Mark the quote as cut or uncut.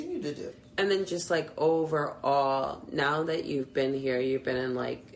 uncut